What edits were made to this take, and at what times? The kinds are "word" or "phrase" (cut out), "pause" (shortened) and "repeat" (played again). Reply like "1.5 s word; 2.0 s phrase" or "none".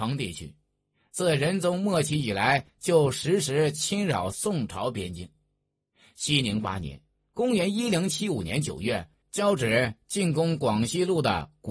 none